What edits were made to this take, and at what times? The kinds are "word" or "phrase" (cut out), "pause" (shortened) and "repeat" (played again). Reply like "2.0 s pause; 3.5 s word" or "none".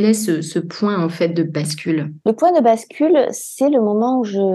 2.2 s pause